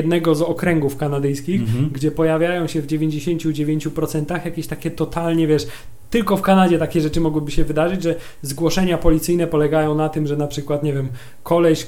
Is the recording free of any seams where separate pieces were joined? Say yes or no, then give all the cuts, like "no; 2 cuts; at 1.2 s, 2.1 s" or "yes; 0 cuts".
yes; 0 cuts